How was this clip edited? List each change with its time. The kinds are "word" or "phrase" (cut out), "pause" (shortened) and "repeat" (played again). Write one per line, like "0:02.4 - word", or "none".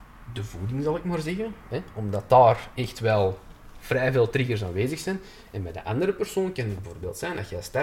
none